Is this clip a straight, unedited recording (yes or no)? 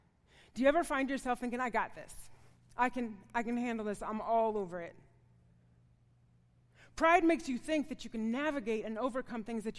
yes